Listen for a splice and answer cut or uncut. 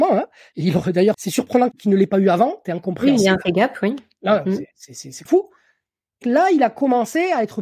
cut